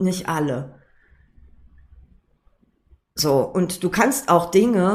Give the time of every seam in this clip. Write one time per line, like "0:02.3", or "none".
none